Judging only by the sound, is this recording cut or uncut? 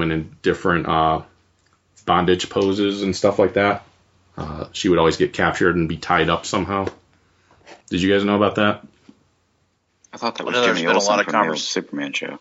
cut